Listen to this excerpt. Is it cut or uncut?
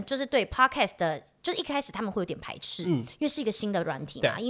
uncut